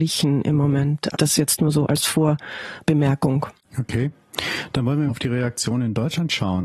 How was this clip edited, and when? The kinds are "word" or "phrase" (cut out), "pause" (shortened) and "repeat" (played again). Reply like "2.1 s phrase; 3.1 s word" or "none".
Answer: 1.1 s word; 5.1 s word